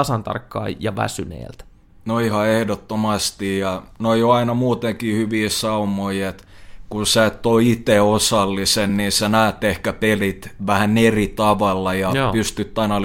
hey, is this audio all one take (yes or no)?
yes